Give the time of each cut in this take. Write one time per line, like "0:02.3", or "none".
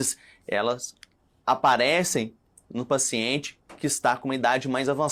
none